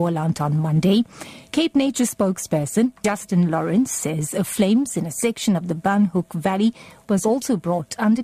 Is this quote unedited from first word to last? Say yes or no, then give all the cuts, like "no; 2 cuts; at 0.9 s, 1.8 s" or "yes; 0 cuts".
yes; 0 cuts